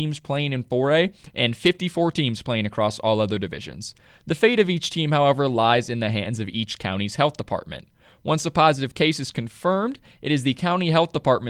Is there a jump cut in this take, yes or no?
no